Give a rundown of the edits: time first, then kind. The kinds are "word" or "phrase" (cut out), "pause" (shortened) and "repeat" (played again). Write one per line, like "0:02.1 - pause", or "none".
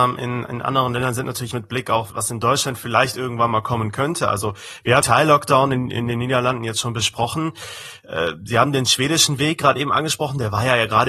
0:01.5 - phrase
0:02.1 - word
0:05.0 - word